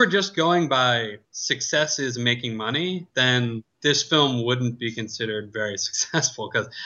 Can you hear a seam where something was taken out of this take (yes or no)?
yes